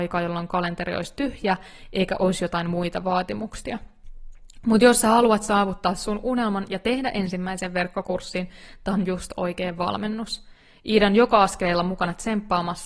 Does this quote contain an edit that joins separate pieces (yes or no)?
no